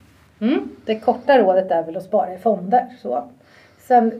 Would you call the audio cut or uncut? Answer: uncut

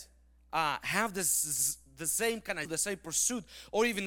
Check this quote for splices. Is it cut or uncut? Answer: cut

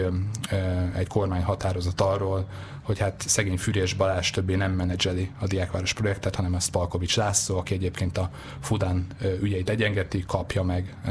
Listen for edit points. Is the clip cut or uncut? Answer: uncut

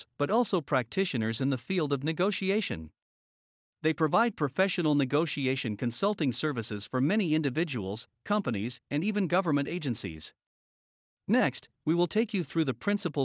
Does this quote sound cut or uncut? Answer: uncut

